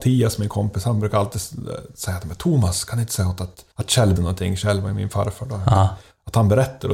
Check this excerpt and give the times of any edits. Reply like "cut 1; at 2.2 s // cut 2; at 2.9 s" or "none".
cut 1; at 3.7 s // cut 2; at 4.2 s